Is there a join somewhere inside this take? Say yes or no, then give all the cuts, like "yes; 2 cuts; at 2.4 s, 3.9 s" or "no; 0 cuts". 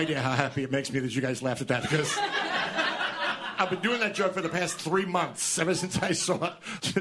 no; 0 cuts